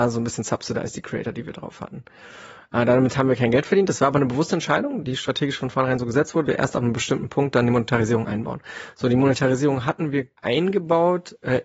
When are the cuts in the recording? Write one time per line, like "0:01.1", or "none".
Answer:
0:05.0
0:06.5
0:10.4